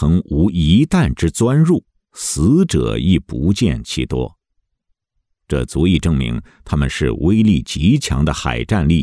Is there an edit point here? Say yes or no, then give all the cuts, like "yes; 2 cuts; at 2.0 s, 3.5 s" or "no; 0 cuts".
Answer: no; 0 cuts